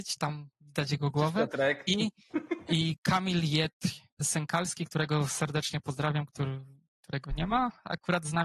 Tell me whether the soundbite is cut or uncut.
uncut